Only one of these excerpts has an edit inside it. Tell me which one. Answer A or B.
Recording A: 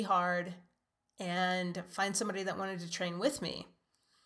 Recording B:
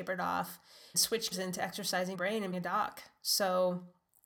B